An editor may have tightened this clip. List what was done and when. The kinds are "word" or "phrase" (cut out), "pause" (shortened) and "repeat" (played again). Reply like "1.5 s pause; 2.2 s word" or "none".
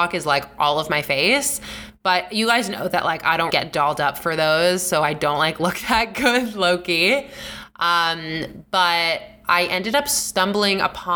3.5 s word